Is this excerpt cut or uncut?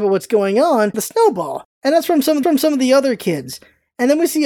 cut